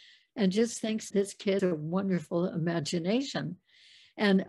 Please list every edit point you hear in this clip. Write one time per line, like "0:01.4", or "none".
0:01.1
0:01.6